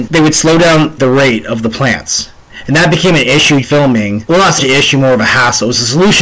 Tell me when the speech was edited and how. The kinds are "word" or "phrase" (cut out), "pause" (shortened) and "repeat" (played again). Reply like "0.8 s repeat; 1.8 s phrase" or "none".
1.0 s word; 3.6 s word; 4.6 s word